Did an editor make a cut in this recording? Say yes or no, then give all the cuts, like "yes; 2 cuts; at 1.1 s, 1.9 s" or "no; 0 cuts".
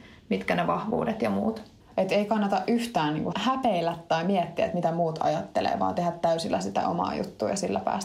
yes; 2 cuts; at 1.8 s, 3.3 s